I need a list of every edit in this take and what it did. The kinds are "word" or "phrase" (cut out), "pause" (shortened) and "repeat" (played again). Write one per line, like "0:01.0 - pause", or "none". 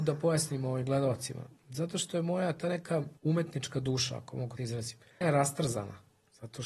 0:03.2 - pause
0:04.6 - phrase
0:05.2 - word